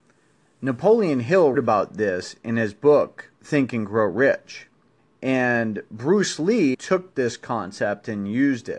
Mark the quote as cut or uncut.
cut